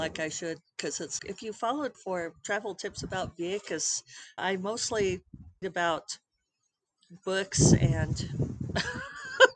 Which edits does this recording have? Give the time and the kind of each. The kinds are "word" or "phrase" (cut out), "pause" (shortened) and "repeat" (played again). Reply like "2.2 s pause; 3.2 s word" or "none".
1.2 s word; 1.9 s word; 4.4 s word; 5.6 s word